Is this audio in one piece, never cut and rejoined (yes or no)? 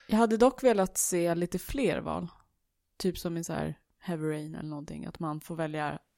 yes